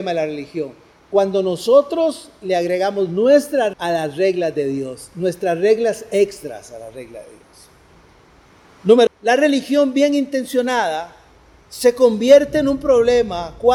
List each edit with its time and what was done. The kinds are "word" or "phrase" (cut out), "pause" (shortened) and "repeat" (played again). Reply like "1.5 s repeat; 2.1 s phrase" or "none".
3.7 s word; 9.1 s word